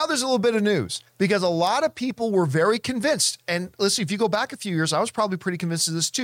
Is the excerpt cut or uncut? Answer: cut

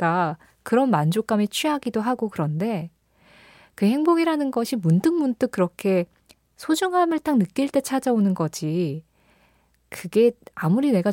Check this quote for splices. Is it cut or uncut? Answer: uncut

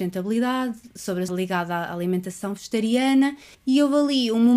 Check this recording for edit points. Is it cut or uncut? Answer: cut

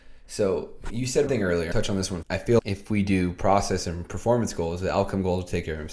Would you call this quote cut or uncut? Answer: cut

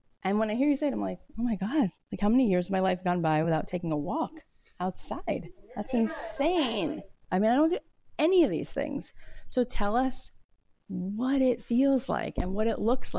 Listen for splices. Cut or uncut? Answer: uncut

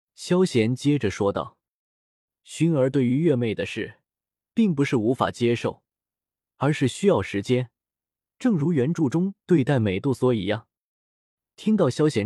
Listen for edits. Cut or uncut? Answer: uncut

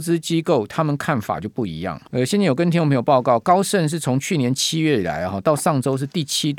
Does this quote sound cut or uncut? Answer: cut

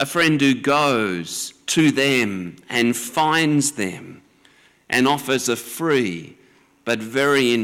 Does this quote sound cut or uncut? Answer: uncut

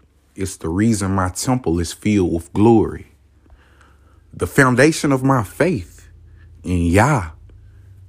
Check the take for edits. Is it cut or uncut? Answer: uncut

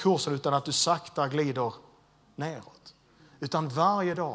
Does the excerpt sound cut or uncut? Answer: uncut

